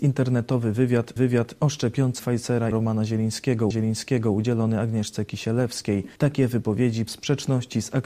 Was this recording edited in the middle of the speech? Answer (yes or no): yes